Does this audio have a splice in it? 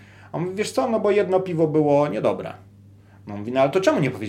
no; 0 cuts

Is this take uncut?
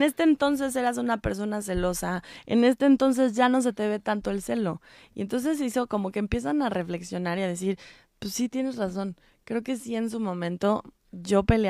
yes; 0 cuts

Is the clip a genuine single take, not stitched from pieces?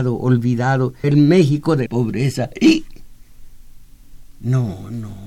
no; 2 cuts; at 1.0 s, 1.9 s

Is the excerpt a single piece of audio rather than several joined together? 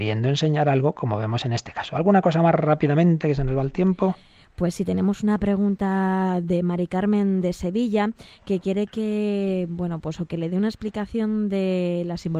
yes; 0 cuts

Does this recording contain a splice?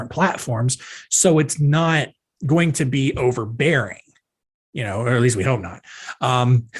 no; 0 cuts

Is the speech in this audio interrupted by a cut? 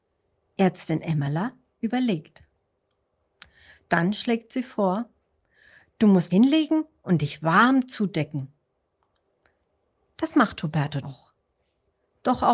yes; 2 cuts; at 6.3 s, 11.0 s

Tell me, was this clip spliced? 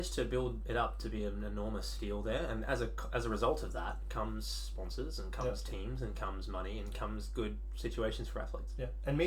no; 0 cuts

